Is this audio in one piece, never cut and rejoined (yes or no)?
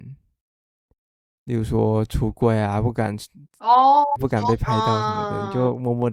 no